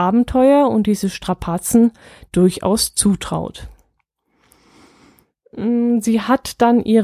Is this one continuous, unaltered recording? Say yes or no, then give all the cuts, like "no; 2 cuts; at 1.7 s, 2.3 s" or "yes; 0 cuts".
yes; 0 cuts